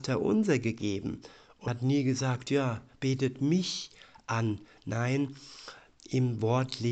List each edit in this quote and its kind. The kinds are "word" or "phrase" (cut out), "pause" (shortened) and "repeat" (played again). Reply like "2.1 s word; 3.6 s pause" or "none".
1.7 s word